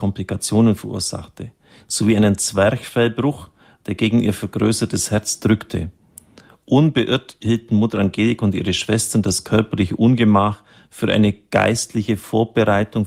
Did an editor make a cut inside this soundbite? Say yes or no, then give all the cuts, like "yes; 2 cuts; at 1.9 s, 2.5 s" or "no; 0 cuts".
no; 0 cuts